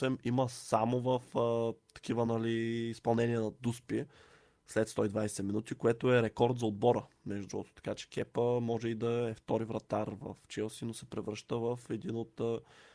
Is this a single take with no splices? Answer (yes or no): yes